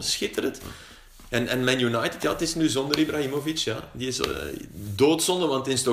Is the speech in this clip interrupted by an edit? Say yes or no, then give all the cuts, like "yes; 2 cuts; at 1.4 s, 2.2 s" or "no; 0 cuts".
no; 0 cuts